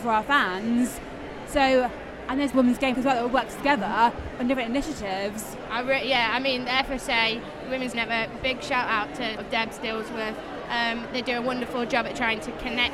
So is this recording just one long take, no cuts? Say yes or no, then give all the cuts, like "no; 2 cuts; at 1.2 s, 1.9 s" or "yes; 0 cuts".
no; 4 cuts; at 2.5 s, 2.9 s, 7.9 s, 9.4 s